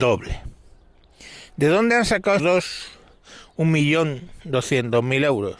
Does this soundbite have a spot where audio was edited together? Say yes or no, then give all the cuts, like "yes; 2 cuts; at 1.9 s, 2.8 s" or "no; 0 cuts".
yes; 1 cut; at 2.4 s